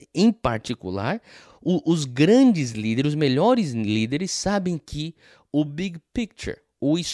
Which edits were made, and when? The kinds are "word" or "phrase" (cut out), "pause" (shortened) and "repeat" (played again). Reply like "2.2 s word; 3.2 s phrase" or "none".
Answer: none